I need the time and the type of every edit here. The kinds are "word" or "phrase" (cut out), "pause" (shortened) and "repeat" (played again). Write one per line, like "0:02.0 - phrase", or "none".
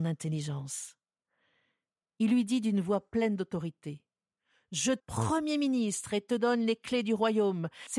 0:05.0 - word